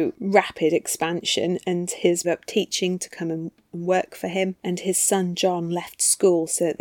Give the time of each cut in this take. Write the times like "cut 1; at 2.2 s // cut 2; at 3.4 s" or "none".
cut 1; at 2.2 s // cut 2; at 4.6 s

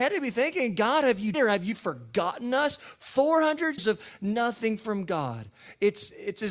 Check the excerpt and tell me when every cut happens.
cut 1; at 1.3 s // cut 2; at 3.8 s

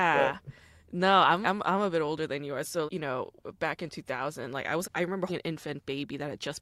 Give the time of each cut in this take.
cut 1; at 1.4 s // cut 2; at 2.9 s // cut 3; at 4.8 s // cut 4; at 5.3 s

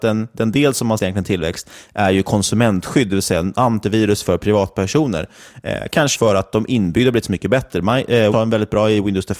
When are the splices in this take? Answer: cut 1; at 1.0 s // cut 2; at 6.1 s // cut 3; at 8.3 s

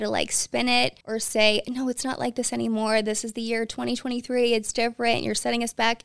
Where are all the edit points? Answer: cut 1; at 1.0 s

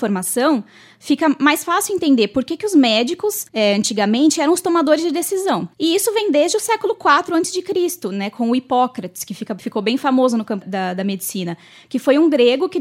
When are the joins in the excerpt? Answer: cut 1; at 3.5 s // cut 2; at 5.7 s // cut 3; at 10.6 s

